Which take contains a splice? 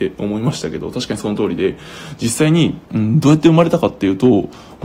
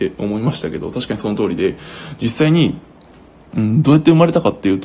first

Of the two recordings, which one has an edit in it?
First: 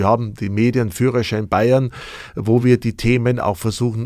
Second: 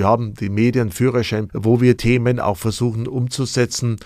second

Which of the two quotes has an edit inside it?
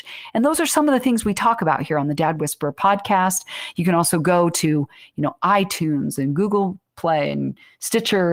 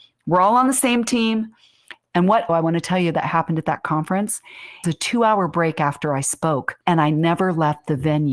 second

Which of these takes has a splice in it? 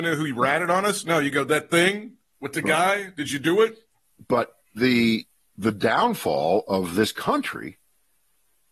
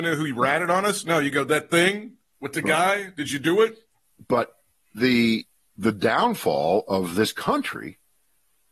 first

